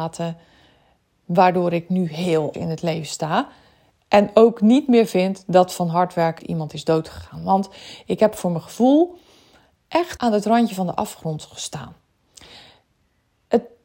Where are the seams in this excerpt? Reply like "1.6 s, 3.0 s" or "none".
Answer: 2.5 s, 6.4 s, 10.2 s